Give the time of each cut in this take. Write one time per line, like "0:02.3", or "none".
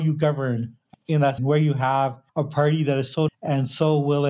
0:00.9
0:01.4
0:02.3
0:03.3